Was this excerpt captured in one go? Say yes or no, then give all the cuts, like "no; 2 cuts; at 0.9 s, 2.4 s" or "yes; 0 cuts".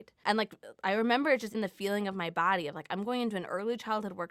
no; 1 cut; at 1.5 s